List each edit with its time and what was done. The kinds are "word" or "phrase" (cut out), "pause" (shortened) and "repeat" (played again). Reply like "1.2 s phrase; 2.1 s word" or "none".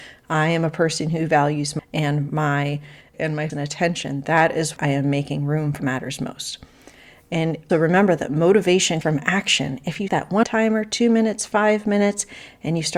1.8 s word; 3.1 s word; 3.5 s word; 4.8 s word; 5.8 s word; 7.7 s word; 9.0 s word; 10.1 s word; 10.4 s word